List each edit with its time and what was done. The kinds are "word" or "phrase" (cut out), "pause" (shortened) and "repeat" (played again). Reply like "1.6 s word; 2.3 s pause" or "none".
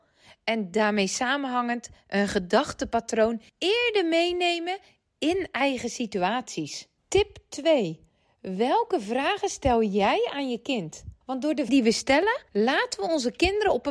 3.5 s pause; 7.0 s pause; 11.2 s pause; 11.7 s word; 12.5 s pause